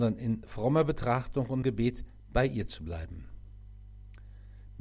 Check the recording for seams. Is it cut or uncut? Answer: cut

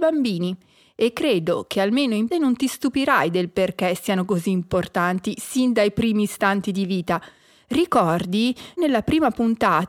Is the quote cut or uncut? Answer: cut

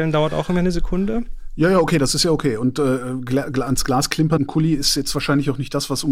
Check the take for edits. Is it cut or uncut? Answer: cut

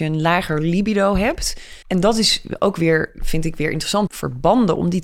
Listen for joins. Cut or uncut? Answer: cut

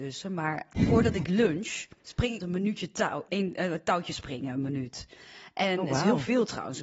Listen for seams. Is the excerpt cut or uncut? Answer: cut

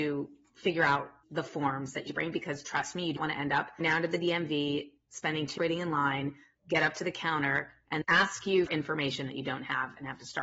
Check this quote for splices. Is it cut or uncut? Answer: cut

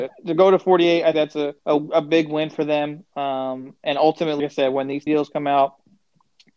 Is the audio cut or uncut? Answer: cut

